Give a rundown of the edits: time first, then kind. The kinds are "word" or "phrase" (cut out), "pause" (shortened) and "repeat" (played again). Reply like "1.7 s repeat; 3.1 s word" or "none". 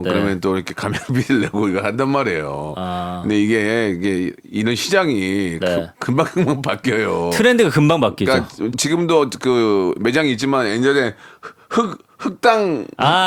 8.7 s word